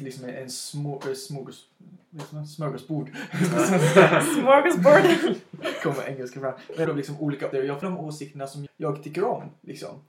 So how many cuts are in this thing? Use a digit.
4